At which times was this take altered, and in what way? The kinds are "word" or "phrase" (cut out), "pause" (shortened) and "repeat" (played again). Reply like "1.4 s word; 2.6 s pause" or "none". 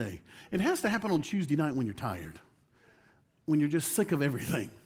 none